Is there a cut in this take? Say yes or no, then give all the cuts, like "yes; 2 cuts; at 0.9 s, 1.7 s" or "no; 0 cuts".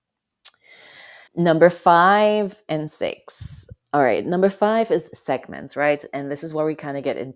yes; 1 cut; at 1.3 s